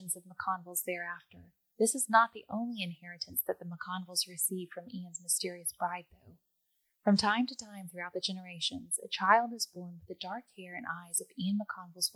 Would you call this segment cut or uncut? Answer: uncut